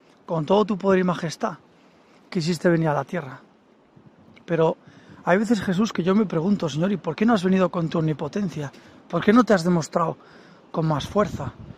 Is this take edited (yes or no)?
no